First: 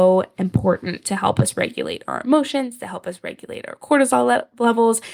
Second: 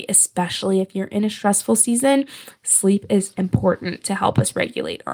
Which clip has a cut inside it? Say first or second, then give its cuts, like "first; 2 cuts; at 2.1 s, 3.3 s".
second; 1 cut; at 3.3 s